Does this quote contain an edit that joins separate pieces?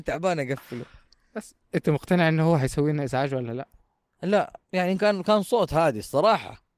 no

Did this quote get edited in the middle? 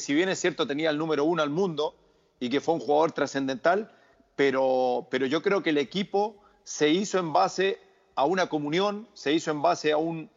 no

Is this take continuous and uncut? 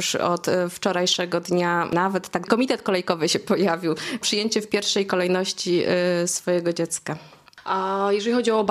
no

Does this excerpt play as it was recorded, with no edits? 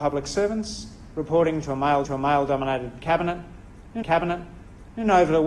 no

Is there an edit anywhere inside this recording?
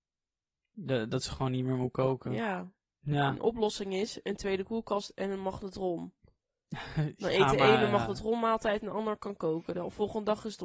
no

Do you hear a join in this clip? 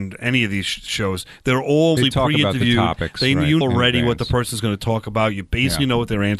yes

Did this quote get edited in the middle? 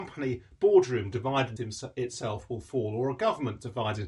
yes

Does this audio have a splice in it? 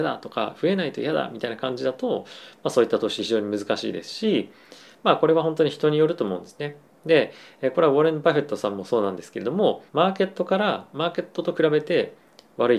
yes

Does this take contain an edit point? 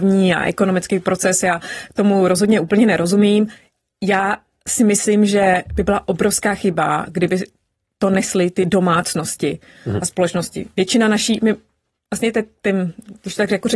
no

